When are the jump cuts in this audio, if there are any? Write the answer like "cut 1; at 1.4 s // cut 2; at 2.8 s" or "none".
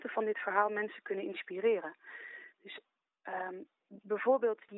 none